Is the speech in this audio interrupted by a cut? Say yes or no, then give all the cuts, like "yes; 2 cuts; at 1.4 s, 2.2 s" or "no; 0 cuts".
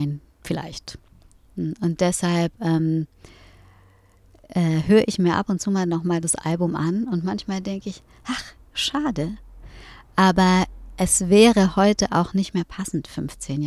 no; 0 cuts